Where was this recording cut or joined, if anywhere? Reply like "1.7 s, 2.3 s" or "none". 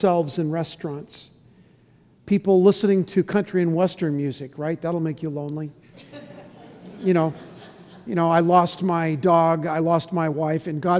none